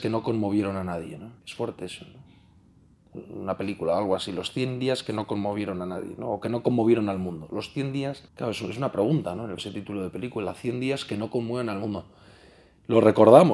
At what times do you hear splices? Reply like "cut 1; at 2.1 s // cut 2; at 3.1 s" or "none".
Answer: cut 1; at 1.4 s // cut 2; at 8.3 s // cut 3; at 9.6 s

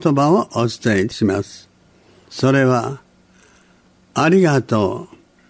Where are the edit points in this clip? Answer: none

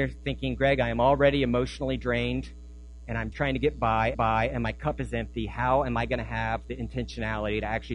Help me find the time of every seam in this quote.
cut 1; at 3.3 s // cut 2; at 4.1 s

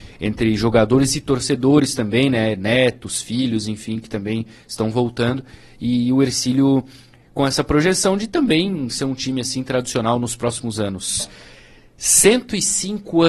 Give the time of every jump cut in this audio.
none

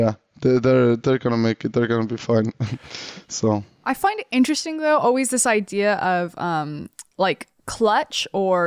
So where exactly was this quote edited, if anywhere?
cut 1; at 7.1 s

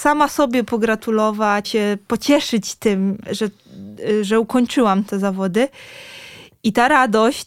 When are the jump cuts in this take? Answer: cut 1; at 1.6 s // cut 2; at 3.3 s

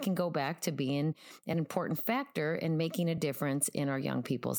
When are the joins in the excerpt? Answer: none

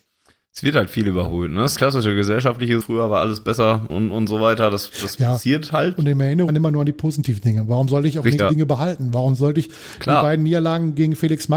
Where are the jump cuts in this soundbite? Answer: cut 1; at 1.7 s // cut 2; at 2.8 s // cut 3; at 3.9 s // cut 4; at 6.5 s // cut 5; at 8.4 s

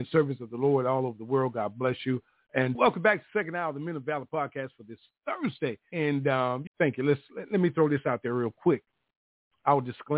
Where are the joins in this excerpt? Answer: cut 1; at 2.7 s // cut 2; at 6.7 s

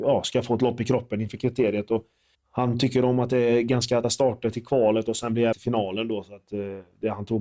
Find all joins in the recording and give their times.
cut 1; at 2.3 s // cut 2; at 4.0 s // cut 3; at 5.5 s

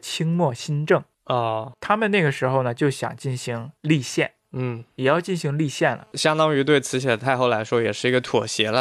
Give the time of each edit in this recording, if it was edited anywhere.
cut 1; at 3.8 s

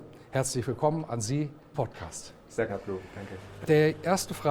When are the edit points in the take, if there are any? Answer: cut 1; at 1.1 s // cut 2; at 1.7 s // cut 3; at 2.7 s // cut 4; at 3.6 s

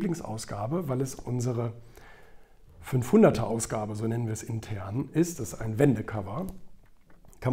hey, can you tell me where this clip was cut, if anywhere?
none

